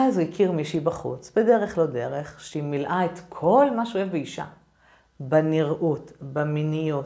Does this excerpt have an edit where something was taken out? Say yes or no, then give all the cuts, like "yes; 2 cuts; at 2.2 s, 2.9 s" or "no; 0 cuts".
no; 0 cuts